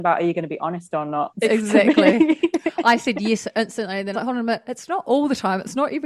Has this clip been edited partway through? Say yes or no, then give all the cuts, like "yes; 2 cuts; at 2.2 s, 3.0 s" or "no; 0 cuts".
yes; 2 cuts; at 1.4 s, 4.1 s